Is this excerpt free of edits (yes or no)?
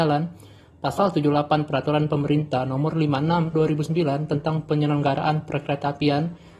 no